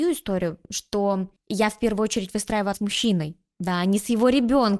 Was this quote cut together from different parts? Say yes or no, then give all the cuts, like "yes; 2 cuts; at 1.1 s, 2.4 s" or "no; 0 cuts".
yes; 1 cut; at 2.7 s